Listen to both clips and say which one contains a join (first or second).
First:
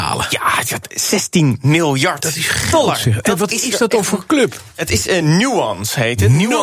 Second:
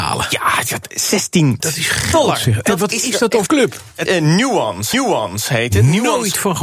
second